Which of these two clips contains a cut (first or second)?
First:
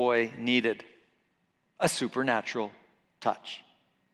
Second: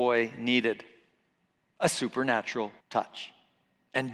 second